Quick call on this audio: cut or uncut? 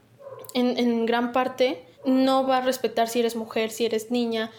cut